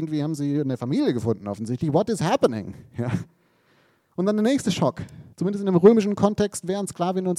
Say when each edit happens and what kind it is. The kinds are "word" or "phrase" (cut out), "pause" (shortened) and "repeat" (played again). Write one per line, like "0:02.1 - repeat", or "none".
0:05.3 - pause